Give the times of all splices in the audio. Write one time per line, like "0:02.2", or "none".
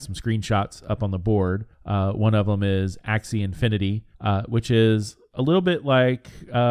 0:01.7
0:04.1